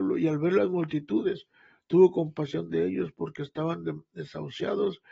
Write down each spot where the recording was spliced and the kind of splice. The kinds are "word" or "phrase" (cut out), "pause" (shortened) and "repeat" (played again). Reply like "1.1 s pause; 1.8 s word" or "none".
none